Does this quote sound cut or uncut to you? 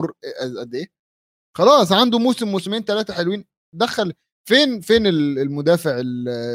uncut